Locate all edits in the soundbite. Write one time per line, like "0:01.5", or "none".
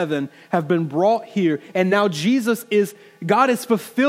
none

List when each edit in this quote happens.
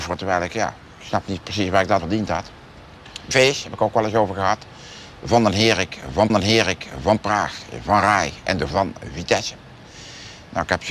0:02.0
0:03.3
0:06.3
0:08.7

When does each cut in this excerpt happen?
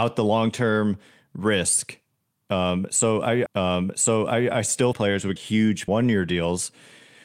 0:03.5
0:04.9
0:05.4
0:05.9

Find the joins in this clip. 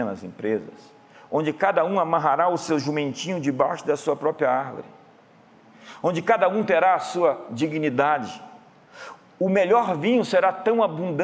none

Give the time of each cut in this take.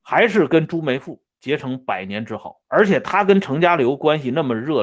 0:02.6

